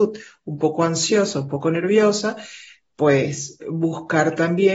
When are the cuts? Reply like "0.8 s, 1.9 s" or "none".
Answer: none